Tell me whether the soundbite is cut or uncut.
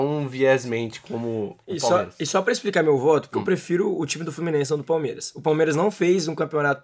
cut